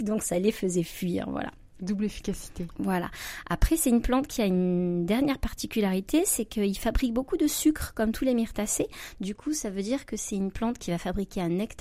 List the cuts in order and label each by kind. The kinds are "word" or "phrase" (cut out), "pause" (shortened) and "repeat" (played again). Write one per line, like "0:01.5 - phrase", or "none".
none